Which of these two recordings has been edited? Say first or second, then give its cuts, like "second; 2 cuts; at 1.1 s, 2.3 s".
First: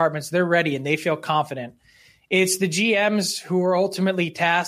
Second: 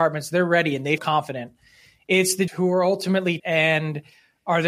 second; 3 cuts; at 1.0 s, 2.5 s, 3.4 s